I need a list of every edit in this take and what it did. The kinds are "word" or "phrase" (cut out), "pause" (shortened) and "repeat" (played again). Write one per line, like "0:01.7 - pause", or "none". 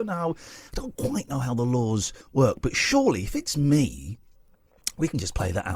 0:02.2 - pause